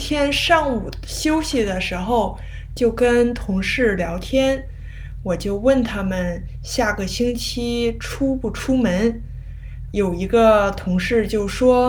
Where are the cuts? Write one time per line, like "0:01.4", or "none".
0:09.9